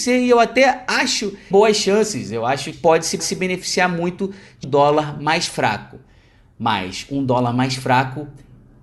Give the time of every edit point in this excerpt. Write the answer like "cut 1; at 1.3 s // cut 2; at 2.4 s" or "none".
cut 1; at 1.5 s // cut 2; at 2.7 s // cut 3; at 3.2 s // cut 4; at 4.6 s